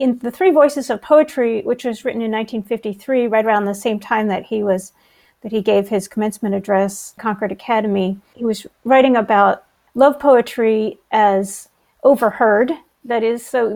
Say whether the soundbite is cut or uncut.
uncut